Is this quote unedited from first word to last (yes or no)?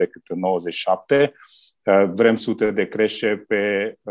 no